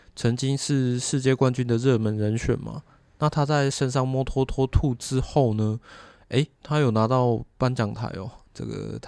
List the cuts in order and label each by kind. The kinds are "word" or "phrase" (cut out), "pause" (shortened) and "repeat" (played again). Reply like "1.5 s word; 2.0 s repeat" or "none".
4.5 s repeat; 6.5 s pause